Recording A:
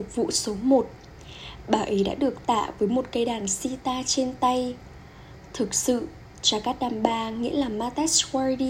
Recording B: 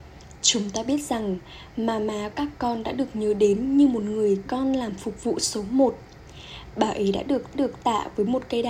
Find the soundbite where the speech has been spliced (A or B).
B